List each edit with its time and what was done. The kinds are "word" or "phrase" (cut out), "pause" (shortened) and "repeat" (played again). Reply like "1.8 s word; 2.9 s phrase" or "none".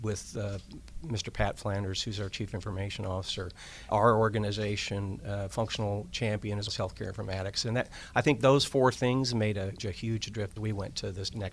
3.9 s word; 6.7 s word; 9.8 s word; 10.6 s phrase